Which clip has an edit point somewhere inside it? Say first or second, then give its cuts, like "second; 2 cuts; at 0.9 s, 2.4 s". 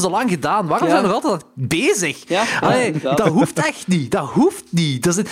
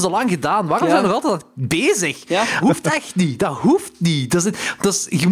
second; 1 cut; at 2.6 s